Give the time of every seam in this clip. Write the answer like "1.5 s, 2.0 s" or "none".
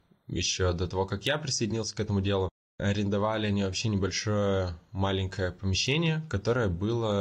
none

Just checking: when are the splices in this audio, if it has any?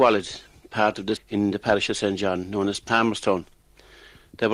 1.2 s

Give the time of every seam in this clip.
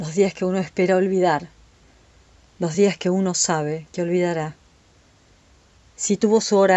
none

